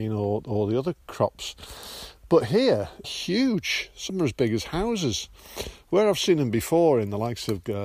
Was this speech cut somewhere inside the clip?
yes; 3 cuts; at 1.0 s, 3.0 s, 4.1 s

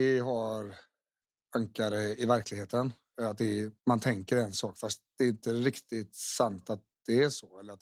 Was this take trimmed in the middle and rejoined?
yes; 1 cut; at 3.8 s

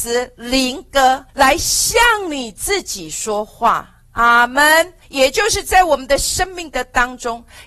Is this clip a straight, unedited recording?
no; 2 cuts; at 1.3 s, 5.0 s

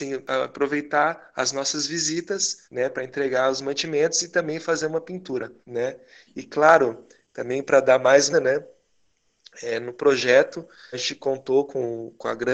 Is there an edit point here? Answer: yes; 4 cuts; at 2.6 s, 5.6 s, 8.3 s, 10.9 s

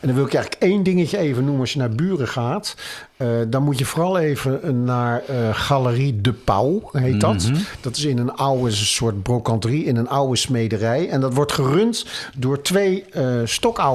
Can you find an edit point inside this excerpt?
no; 0 cuts

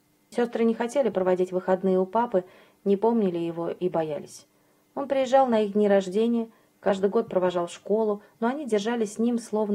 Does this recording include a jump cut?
no; 0 cuts

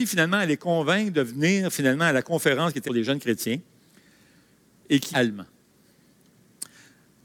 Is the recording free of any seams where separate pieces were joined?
no; 2 cuts; at 2.8 s, 5.1 s

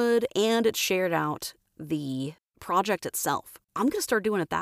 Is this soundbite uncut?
no; 1 cut; at 3.6 s

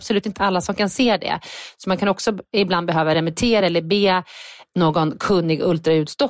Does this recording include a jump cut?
no; 0 cuts

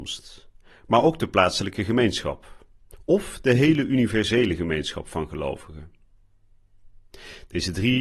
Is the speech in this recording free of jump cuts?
yes; 0 cuts

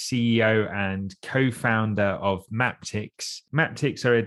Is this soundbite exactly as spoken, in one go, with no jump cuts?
yes; 0 cuts

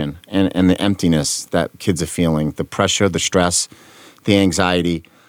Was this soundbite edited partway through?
no; 0 cuts

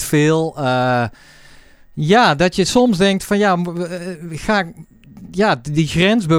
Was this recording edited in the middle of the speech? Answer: no; 0 cuts

